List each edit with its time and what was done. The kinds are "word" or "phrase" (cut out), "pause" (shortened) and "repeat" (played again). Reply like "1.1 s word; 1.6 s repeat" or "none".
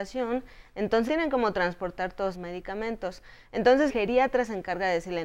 1.1 s word; 2.3 s word; 3.9 s word